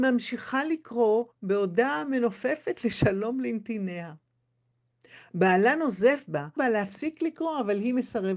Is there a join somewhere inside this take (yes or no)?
yes